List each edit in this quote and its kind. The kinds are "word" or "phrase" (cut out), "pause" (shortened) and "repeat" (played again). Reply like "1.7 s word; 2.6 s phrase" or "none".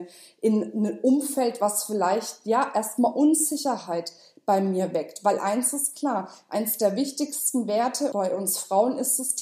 none